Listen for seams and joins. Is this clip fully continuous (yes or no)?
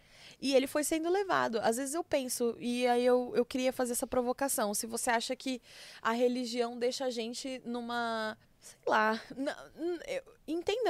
no